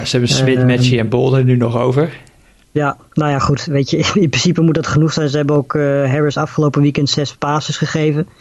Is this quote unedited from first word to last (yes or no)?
yes